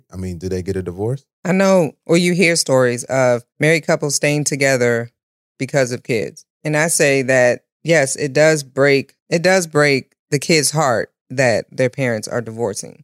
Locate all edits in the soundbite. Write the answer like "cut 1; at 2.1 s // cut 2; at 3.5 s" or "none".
cut 1; at 1.3 s // cut 2; at 2.0 s // cut 3; at 3.5 s // cut 4; at 5.2 s // cut 5; at 6.5 s // cut 6; at 7.7 s // cut 7; at 9.2 s